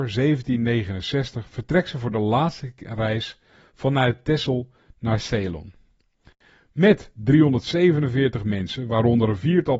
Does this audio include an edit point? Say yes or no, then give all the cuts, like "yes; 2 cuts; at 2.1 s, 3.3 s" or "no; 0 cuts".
no; 0 cuts